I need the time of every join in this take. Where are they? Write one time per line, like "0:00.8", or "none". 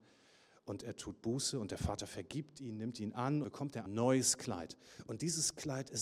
0:03.4
0:03.9

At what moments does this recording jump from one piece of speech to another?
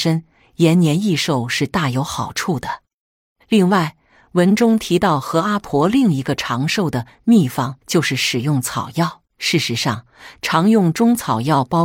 0:07.8
0:09.3

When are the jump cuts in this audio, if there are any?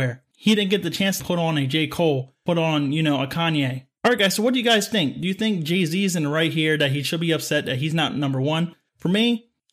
0:01.2

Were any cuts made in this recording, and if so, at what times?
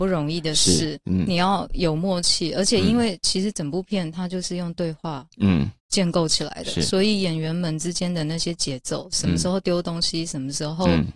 0:05.8

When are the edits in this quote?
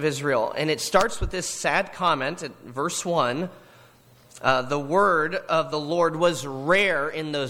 none

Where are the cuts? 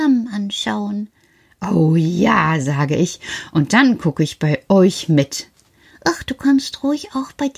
none

